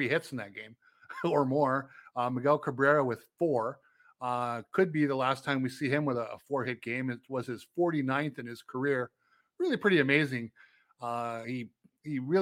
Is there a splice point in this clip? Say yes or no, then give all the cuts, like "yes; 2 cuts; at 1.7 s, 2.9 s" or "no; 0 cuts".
no; 0 cuts